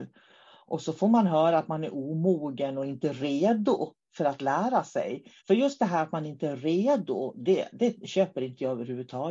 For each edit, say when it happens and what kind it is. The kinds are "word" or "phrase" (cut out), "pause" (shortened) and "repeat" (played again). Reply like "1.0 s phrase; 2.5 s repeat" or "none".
5.4 s pause